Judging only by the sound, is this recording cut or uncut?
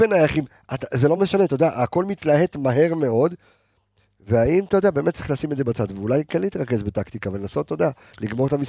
uncut